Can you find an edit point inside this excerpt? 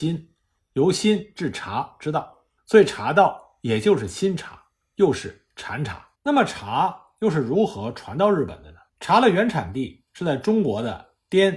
yes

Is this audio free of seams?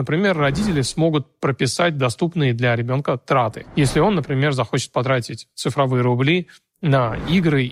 yes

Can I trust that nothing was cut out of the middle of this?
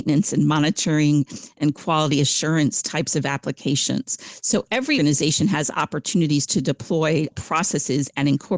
no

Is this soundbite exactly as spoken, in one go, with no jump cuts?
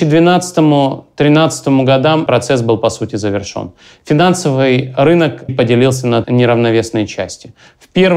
no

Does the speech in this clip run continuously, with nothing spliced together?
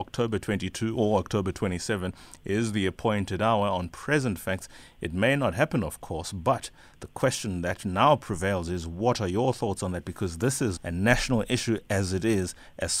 no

